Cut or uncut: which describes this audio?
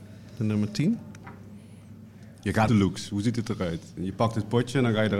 cut